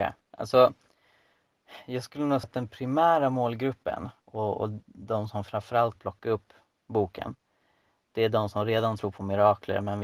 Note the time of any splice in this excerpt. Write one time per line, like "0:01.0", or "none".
0:02.4
0:04.2
0:06.0